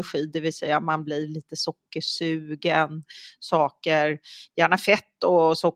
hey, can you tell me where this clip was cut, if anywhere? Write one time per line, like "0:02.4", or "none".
none